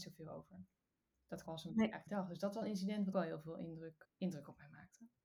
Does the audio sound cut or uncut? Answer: cut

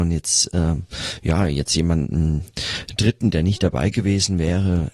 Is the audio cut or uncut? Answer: uncut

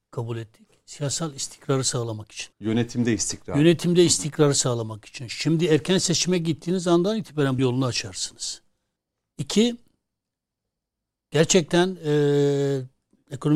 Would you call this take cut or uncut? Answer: cut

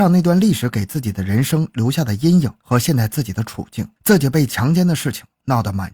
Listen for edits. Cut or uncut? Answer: cut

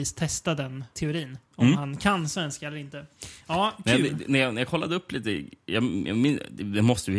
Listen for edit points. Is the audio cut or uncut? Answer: cut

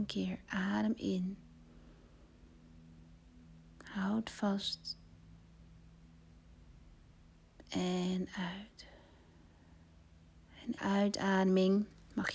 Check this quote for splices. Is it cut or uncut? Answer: cut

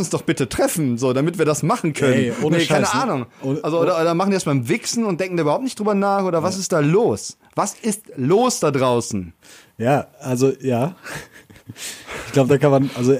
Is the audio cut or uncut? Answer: cut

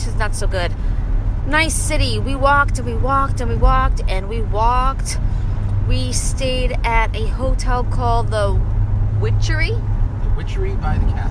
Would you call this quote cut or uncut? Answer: uncut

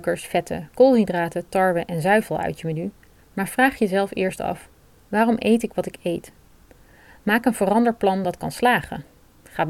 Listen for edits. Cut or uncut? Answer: uncut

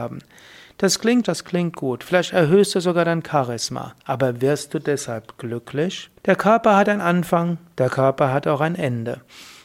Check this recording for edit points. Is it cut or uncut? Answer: cut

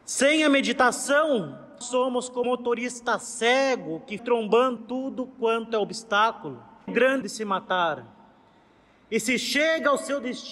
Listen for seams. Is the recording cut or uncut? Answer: cut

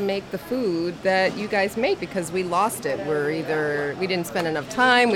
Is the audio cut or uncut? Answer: cut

